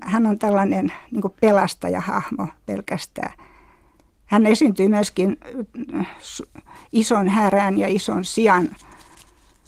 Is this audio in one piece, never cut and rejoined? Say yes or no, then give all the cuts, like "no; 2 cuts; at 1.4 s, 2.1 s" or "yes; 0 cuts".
yes; 0 cuts